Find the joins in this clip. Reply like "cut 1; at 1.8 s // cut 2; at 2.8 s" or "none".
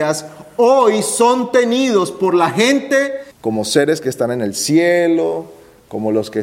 cut 1; at 3.3 s